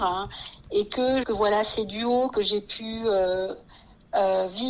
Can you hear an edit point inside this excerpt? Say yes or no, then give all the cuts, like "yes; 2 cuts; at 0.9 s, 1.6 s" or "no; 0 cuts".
yes; 1 cut; at 1.2 s